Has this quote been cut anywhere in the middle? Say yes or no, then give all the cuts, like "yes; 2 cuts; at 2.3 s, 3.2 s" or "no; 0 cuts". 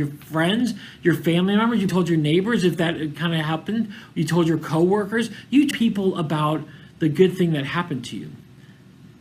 yes; 2 cuts; at 1.9 s, 5.7 s